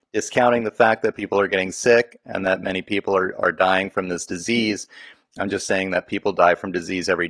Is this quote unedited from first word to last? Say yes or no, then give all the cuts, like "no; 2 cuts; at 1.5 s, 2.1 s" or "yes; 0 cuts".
yes; 0 cuts